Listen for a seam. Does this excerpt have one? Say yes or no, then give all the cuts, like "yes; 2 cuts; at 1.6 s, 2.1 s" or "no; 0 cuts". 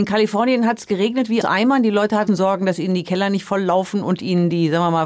yes; 2 cuts; at 1.4 s, 2.3 s